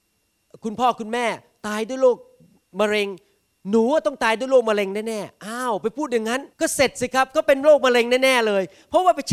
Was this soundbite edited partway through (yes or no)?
yes